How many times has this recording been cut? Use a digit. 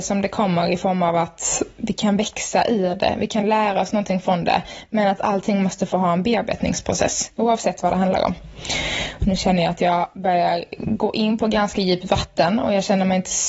0